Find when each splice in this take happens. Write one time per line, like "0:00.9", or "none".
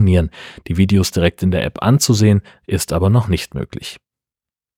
none